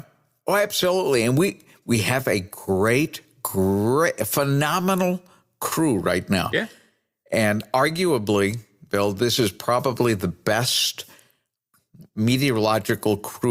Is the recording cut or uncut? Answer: uncut